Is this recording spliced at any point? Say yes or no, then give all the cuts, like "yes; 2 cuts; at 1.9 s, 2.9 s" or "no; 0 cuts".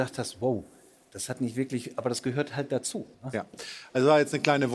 yes; 1 cut; at 3.1 s